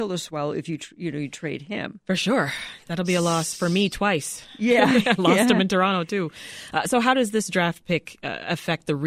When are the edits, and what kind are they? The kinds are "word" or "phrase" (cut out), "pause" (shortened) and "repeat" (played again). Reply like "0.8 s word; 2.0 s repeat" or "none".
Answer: none